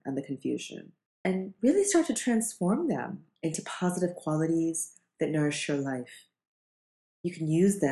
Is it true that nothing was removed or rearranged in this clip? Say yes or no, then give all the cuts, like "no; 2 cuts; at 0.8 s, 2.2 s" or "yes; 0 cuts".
no; 1 cut; at 1.1 s